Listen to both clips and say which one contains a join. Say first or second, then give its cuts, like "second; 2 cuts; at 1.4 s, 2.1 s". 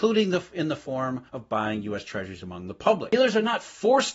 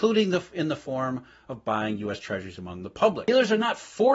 first; 1 cut; at 1.3 s